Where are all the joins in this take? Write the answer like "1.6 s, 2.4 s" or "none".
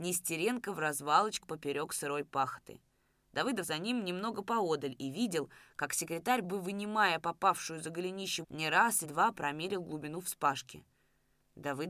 1.4 s, 3.6 s, 6.4 s, 8.4 s, 9.0 s